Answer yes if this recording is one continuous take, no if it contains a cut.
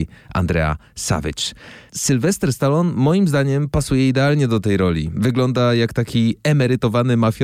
yes